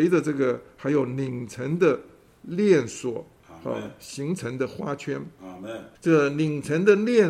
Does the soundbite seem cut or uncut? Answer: cut